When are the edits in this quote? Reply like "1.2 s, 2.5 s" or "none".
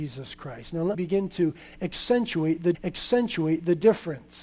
0.9 s, 2.7 s

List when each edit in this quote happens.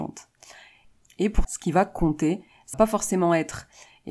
1.4 s, 2.7 s

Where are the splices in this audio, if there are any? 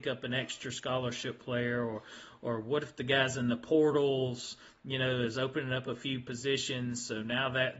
none

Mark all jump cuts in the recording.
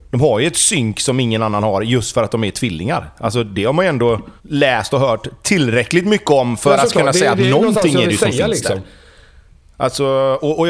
4.4 s

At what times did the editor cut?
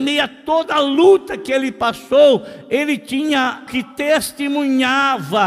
3.7 s

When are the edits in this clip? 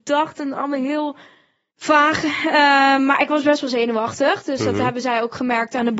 none

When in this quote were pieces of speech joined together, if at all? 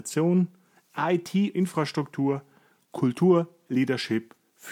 1.5 s

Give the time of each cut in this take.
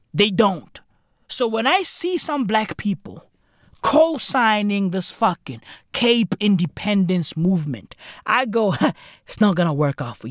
none

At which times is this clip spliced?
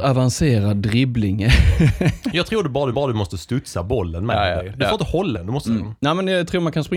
2.9 s, 5.3 s, 5.6 s

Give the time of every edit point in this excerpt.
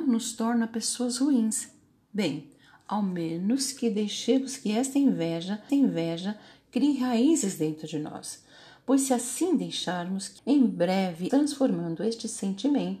5.7 s, 10.4 s, 11.3 s

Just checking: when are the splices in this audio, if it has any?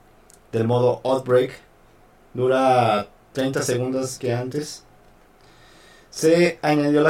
4.2 s

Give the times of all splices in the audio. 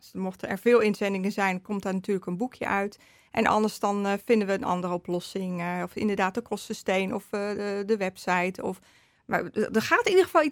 none

